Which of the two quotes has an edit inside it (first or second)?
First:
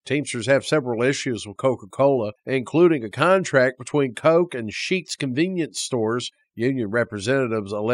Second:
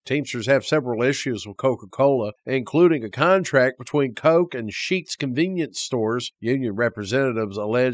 second